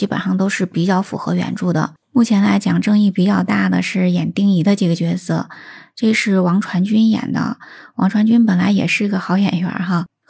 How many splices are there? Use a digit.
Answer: 1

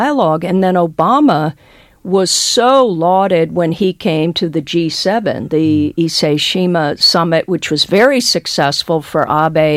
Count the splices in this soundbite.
0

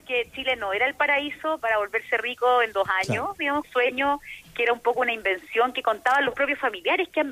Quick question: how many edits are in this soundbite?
2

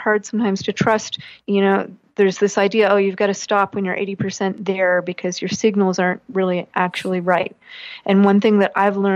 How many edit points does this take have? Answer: 0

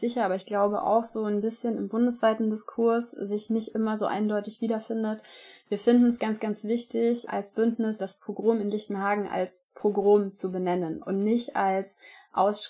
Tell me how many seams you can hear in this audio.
0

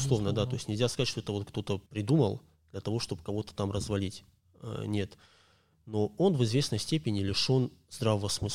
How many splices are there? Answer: 1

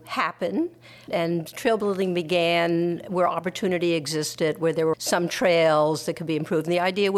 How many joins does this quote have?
1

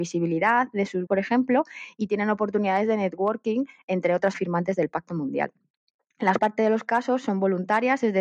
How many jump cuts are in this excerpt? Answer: 3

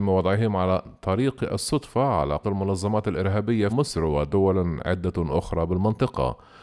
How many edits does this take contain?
2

